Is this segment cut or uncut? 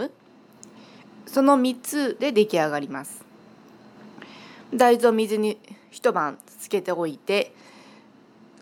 uncut